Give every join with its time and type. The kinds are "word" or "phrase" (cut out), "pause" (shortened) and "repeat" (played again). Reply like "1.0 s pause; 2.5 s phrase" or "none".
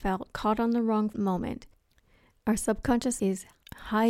1.1 s word; 3.2 s word